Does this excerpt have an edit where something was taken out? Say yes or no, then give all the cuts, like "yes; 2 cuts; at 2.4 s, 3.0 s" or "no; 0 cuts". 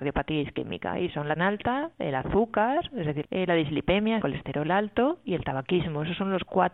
yes; 3 cuts; at 1.4 s, 3.2 s, 4.2 s